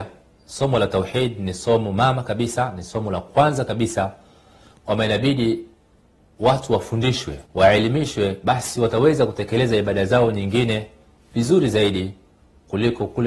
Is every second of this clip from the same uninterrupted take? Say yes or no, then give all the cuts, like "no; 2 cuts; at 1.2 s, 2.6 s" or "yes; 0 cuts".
no; 1 cut; at 7.4 s